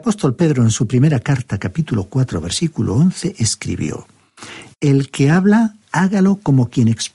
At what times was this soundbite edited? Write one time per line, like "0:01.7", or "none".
0:05.8